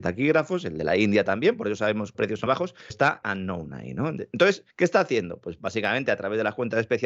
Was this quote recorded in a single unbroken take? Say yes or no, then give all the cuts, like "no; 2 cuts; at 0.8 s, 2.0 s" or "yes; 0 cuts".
no; 5 cuts; at 2.1 s, 2.5 s, 2.9 s, 3.2 s, 4.7 s